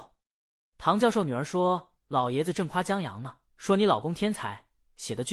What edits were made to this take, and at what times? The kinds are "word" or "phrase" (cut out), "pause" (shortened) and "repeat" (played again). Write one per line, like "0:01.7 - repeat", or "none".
0:03.5 - pause